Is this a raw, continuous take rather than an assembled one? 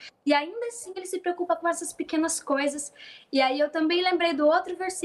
yes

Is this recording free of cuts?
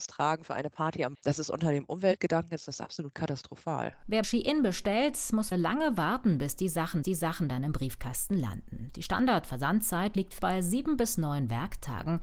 no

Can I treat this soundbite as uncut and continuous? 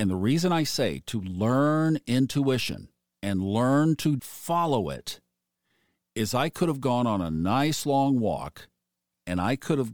no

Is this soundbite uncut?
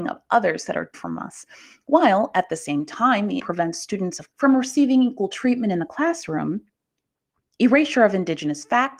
no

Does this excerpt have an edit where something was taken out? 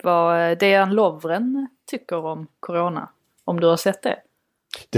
no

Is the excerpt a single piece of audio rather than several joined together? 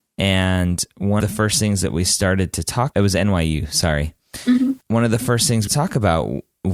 no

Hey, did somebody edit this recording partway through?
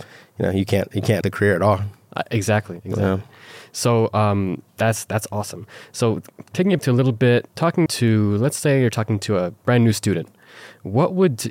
yes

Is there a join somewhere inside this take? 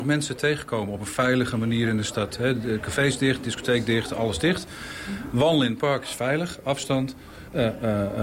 no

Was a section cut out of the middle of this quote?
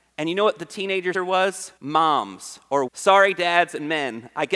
yes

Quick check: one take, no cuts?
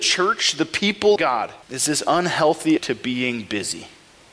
no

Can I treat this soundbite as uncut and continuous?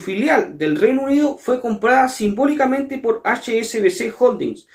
yes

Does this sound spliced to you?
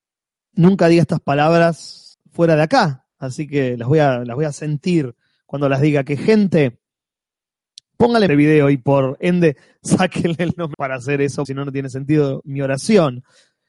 yes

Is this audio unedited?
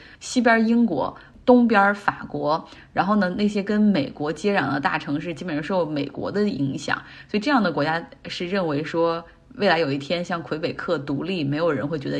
yes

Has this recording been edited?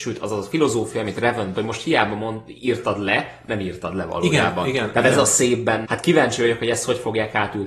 yes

